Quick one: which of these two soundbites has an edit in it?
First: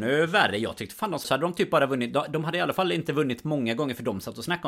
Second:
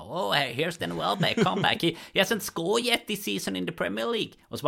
first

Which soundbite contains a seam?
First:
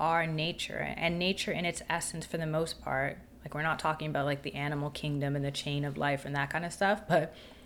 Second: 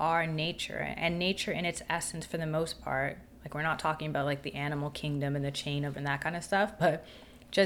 second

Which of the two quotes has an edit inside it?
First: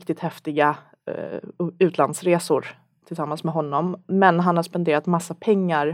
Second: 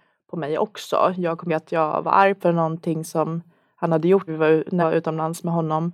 second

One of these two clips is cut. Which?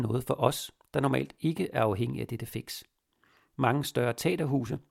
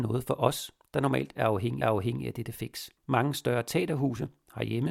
second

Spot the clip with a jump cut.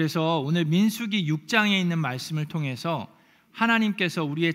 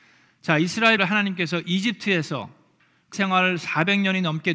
second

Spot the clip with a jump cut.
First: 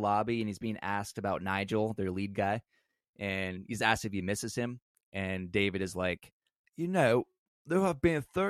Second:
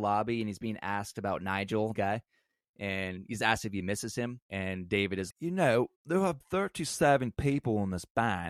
second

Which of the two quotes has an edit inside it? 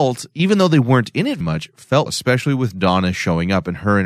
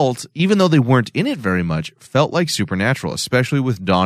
first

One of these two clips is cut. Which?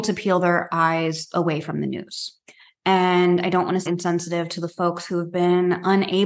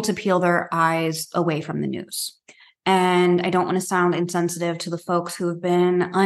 first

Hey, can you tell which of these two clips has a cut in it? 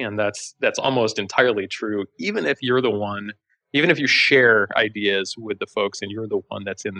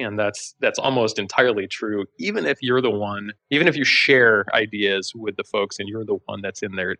second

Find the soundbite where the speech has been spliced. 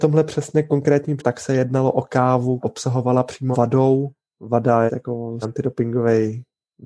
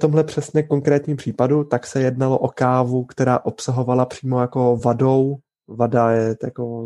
first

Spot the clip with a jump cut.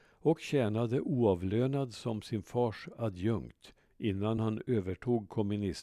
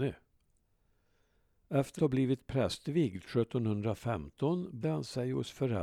second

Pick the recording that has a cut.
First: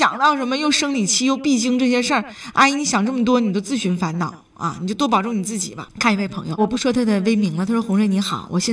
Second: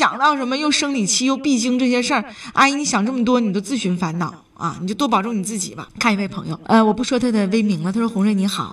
first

